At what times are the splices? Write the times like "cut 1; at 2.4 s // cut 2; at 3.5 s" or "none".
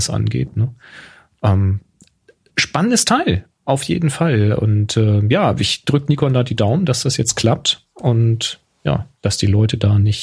none